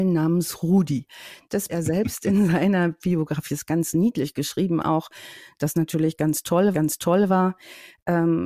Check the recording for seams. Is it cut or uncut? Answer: cut